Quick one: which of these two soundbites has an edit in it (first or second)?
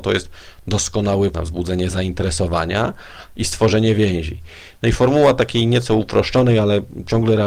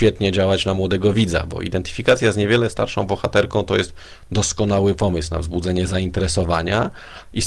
first